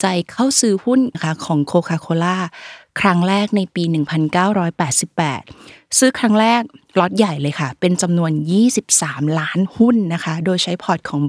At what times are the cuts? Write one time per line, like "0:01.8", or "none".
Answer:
0:01.1